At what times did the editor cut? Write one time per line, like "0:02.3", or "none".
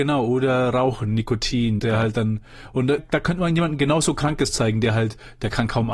0:01.8
0:03.0